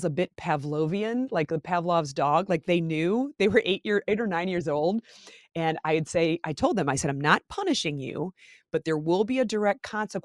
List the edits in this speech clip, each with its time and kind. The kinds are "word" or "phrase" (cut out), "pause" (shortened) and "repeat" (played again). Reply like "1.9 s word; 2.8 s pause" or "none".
none